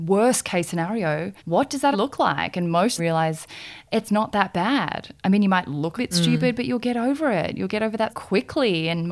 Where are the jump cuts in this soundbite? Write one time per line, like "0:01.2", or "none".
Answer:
0:01.4
0:01.9
0:03.0
0:06.0
0:08.1